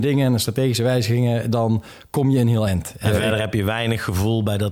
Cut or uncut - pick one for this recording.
uncut